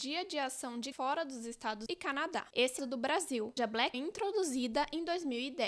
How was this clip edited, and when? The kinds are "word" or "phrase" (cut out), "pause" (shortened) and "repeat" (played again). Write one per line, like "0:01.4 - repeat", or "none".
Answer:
0:00.9 - word
0:01.9 - word
0:02.8 - phrase
0:03.6 - word
0:03.9 - phrase

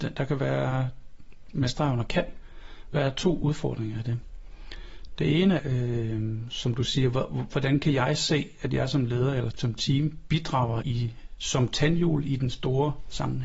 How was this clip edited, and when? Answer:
0:05.6 - word
0:09.5 - word
0:10.8 - word

